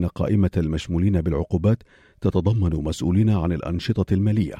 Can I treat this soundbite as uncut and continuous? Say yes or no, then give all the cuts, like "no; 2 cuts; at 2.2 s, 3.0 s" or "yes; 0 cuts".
yes; 0 cuts